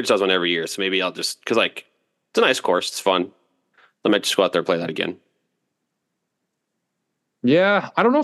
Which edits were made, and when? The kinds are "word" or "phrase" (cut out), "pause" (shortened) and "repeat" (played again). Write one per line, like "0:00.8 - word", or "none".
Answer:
none